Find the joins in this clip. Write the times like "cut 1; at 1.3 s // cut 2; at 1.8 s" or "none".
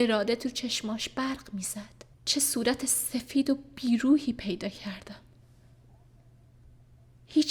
cut 1; at 2.1 s